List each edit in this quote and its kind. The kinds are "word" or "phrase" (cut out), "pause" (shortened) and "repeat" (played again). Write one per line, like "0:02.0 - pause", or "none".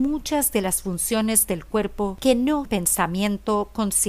0:02.6 - word